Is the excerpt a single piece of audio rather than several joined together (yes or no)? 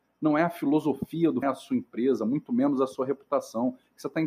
no